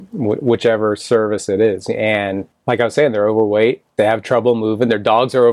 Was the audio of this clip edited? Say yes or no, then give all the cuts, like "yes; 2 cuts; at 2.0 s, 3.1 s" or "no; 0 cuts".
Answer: yes; 2 cuts; at 2.5 s, 3.9 s